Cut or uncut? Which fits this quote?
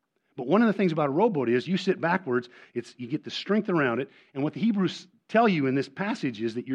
uncut